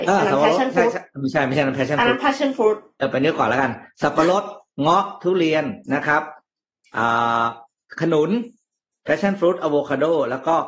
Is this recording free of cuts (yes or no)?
yes